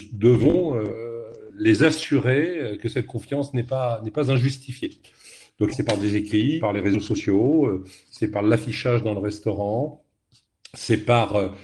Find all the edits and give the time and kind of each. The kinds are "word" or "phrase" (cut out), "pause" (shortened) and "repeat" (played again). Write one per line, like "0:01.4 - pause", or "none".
0:05.7 - word
0:06.6 - word